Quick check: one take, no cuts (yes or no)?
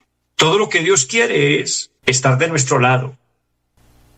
no